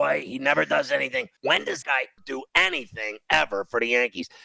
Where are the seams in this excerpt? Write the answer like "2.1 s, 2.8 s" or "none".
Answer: 1.4 s, 1.8 s, 2.2 s

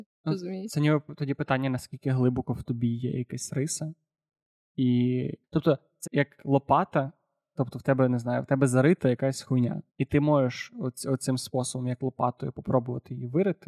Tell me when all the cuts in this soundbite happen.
5.4 s, 6.0 s, 9.9 s

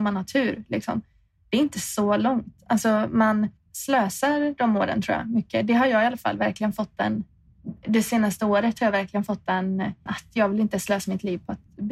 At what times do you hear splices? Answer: 7.5 s, 10.1 s

